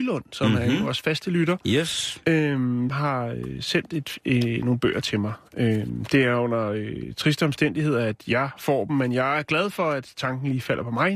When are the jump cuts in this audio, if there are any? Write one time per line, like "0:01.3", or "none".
0:02.9